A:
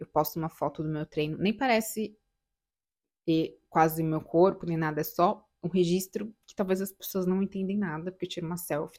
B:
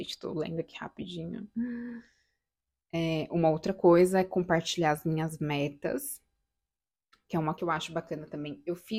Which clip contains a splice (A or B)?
B